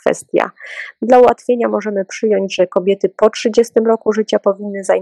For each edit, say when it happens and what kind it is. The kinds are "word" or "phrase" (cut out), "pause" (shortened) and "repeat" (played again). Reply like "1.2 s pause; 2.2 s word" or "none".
none